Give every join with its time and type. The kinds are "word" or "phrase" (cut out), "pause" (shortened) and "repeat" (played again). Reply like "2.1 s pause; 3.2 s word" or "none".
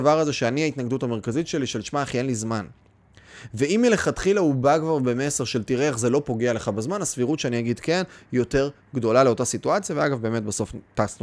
none